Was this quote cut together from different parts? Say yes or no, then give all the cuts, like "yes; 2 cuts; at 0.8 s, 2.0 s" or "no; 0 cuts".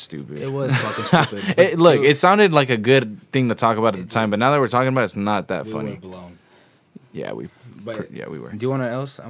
no; 0 cuts